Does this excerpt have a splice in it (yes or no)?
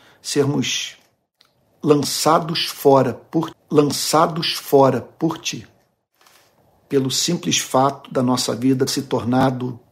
yes